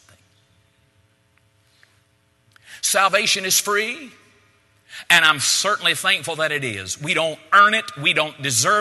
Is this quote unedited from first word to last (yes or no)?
yes